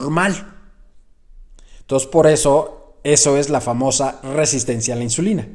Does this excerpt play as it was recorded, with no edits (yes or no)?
yes